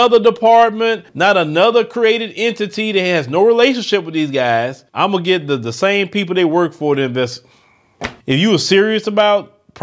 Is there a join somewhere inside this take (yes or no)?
yes